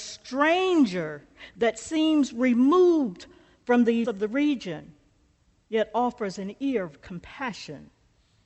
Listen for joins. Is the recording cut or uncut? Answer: cut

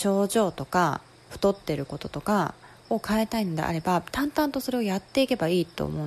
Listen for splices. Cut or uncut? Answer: cut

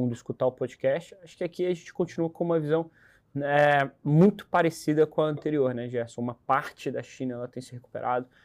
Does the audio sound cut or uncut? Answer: uncut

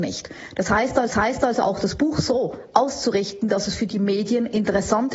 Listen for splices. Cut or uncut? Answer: cut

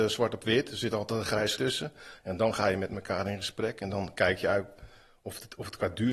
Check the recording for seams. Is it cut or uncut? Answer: cut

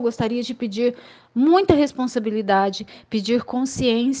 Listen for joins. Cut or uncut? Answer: uncut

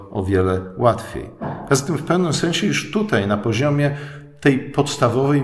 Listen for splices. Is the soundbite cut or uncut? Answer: uncut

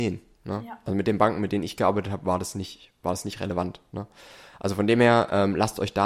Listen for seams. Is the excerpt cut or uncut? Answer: uncut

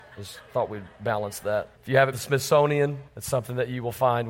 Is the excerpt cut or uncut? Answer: cut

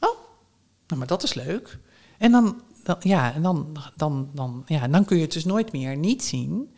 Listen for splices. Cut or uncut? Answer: uncut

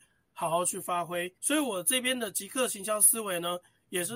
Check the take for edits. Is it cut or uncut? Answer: cut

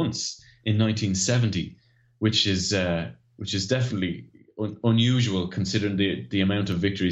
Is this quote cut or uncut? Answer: uncut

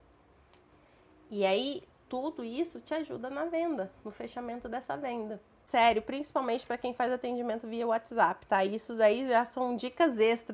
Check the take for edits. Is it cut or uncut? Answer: uncut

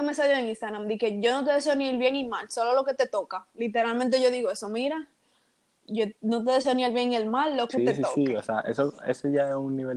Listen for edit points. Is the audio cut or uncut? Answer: uncut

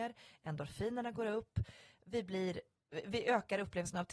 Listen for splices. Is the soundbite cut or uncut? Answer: uncut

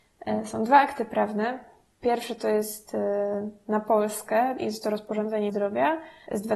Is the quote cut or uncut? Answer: cut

